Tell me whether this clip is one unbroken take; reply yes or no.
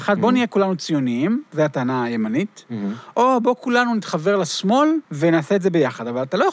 no